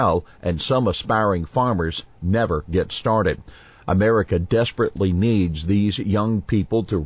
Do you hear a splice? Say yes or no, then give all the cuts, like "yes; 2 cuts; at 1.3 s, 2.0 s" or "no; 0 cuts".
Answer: no; 0 cuts